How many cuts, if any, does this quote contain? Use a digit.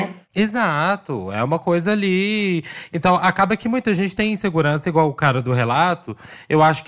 0